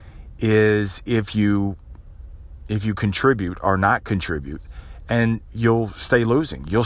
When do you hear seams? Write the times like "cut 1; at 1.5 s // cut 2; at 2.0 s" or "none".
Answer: none